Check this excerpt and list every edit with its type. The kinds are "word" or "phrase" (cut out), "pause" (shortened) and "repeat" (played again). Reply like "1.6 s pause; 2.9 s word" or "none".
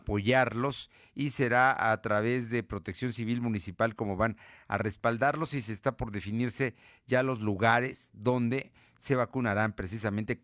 none